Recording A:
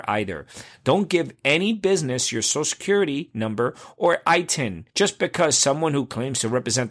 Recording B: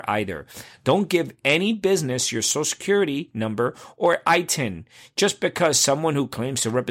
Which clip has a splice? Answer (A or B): A